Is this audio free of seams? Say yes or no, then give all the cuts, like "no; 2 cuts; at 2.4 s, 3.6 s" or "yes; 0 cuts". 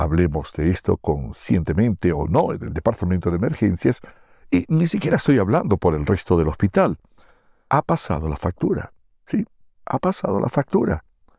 yes; 0 cuts